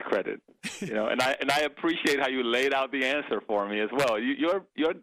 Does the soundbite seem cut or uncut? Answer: uncut